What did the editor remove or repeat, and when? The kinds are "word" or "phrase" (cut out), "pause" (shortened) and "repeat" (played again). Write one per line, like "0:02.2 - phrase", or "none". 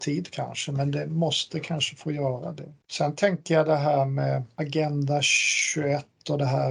0:02.8 - pause